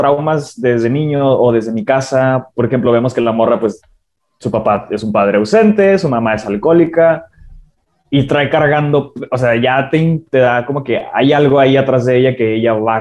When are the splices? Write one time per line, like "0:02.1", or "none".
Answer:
none